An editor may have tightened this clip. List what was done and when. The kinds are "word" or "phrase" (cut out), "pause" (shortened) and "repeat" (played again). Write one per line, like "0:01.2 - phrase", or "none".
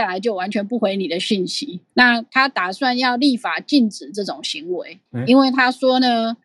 0:01.9 - word
0:05.1 - pause

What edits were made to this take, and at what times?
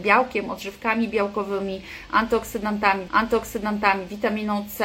0:03.1 - repeat

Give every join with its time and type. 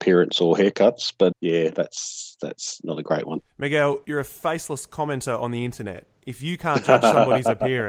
0:01.3 - word
0:03.5 - pause

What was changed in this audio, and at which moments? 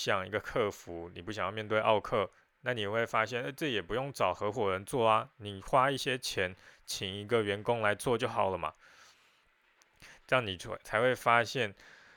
none

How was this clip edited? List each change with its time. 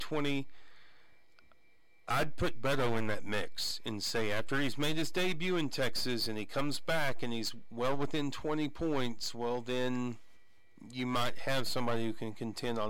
none

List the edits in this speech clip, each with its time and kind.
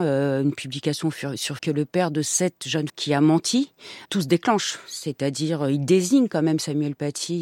0:01.6 - word
0:02.9 - word
0:04.1 - word

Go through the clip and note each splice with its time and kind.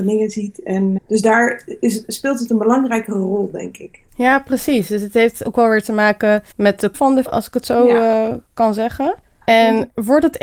0:01.0 - word
0:04.1 - pause
0:06.5 - pause
0:06.9 - word
0:07.2 - word
0:09.2 - pause

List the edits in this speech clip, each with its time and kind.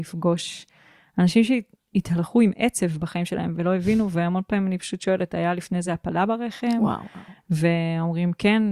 none

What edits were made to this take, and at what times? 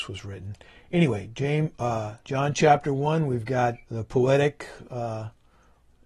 0:02.2 - pause
0:03.9 - pause

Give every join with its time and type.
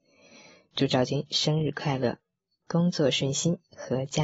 none

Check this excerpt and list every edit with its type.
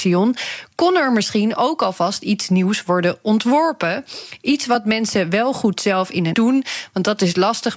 0:06.3 - phrase

